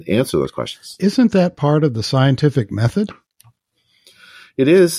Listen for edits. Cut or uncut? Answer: uncut